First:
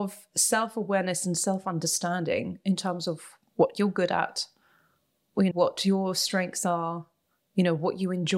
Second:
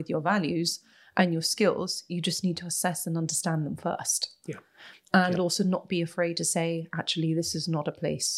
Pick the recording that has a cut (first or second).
first